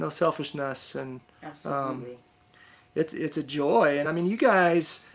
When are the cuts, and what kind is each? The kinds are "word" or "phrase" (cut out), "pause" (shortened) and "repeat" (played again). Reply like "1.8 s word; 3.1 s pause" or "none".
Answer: none